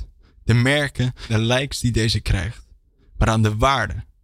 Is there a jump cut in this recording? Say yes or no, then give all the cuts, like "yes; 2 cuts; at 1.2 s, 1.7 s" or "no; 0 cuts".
yes; 1 cut; at 1.3 s